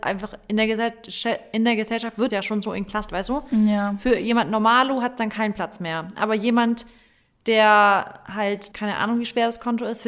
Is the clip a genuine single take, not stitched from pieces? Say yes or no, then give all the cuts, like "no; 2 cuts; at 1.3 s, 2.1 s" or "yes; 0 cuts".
no; 3 cuts; at 2.3 s, 3.1 s, 8.7 s